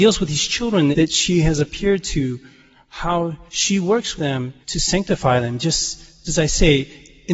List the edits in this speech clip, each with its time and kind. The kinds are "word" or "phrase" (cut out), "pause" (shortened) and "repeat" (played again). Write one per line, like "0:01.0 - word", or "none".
0:00.9 - word
0:03.5 - pause
0:04.2 - word
0:04.6 - pause
0:06.3 - word